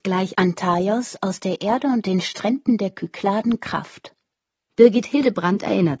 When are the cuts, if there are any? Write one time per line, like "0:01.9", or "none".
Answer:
none